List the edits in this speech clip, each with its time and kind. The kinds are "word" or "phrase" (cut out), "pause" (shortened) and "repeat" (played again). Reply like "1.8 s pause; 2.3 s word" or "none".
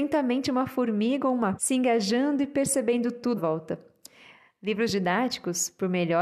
1.6 s word; 3.4 s phrase